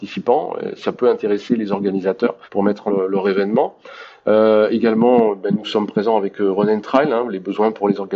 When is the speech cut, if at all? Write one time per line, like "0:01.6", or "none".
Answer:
0:02.4
0:02.9